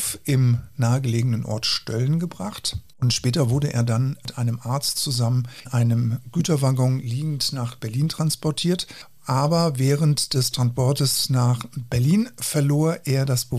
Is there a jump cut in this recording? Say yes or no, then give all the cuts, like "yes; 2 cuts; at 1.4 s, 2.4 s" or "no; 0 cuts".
yes; 1 cut; at 5.6 s